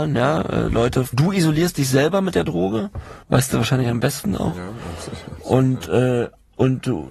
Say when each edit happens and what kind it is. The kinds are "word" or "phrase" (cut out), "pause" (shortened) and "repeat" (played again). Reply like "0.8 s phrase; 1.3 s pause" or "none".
1.1 s word; 3.2 s pause